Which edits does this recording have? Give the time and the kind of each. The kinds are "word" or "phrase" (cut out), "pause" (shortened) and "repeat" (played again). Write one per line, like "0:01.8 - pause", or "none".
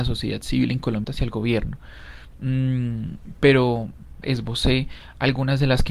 0:01.0 - phrase
0:04.2 - phrase